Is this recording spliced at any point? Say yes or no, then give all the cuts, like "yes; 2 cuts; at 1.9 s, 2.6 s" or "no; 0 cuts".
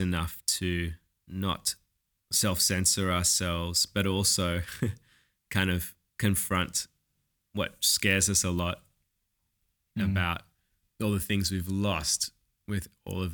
no; 0 cuts